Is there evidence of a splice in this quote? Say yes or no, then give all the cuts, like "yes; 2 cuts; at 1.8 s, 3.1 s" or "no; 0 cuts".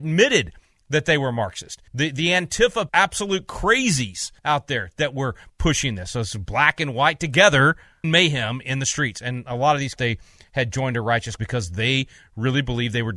yes; 6 cuts; at 1.9 s, 2.9 s, 4.4 s, 8.0 s, 10.0 s, 11.4 s